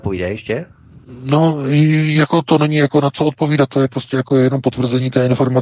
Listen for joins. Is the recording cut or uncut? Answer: uncut